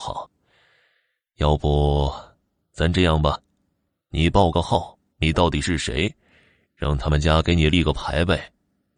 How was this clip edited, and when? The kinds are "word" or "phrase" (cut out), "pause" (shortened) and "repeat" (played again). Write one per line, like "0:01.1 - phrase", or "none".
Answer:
0:05.1 - pause